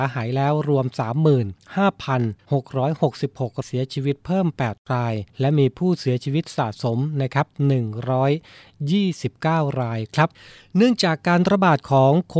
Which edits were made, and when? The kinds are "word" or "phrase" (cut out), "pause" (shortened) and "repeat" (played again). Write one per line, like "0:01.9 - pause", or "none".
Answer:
0:03.6 - phrase
0:05.3 - pause